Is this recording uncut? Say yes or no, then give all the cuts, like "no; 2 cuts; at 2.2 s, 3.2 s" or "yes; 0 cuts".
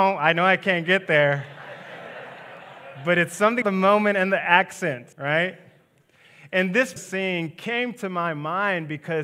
no; 3 cuts; at 3.6 s, 5.1 s, 7.0 s